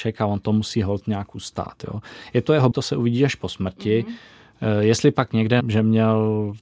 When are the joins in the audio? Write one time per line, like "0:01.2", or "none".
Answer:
0:02.7
0:05.6